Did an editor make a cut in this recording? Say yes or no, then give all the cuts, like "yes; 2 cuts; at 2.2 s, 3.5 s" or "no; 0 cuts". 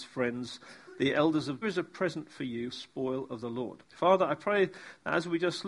yes; 4 cuts; at 1.6 s, 2.7 s, 3.4 s, 3.8 s